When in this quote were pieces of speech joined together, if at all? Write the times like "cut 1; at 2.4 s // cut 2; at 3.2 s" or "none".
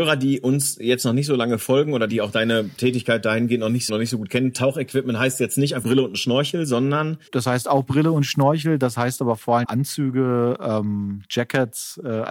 cut 1; at 2.1 s // cut 2; at 2.8 s // cut 3; at 3.9 s // cut 4; at 5.8 s // cut 5; at 7.3 s // cut 6; at 9.6 s